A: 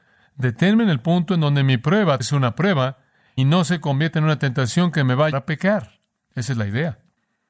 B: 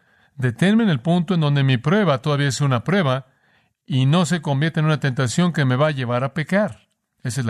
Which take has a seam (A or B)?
A